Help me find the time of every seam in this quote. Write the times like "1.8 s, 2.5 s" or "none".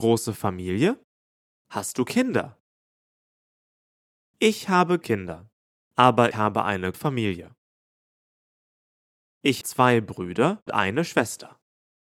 5.0 s, 6.3 s, 6.9 s, 9.6 s, 10.7 s